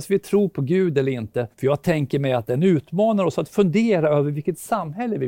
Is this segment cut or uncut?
cut